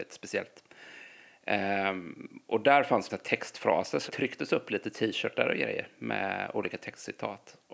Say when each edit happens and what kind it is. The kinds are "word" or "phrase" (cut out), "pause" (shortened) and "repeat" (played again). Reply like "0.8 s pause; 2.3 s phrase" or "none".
3.1 s word; 4.1 s word